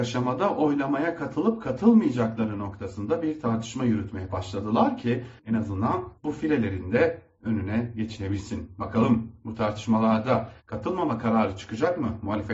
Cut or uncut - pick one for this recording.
cut